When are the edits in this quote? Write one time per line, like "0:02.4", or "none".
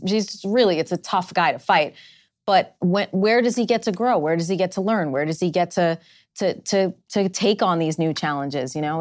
none